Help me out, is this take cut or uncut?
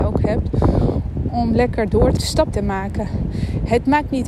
cut